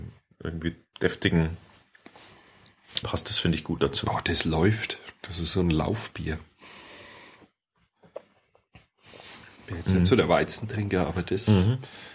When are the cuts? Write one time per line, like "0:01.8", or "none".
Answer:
0:03.0